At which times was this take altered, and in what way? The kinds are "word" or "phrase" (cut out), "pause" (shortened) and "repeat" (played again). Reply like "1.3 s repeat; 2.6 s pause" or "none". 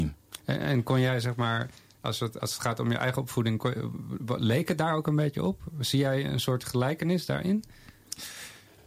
none